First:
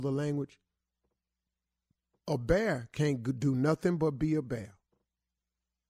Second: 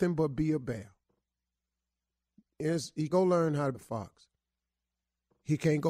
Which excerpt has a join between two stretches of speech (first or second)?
second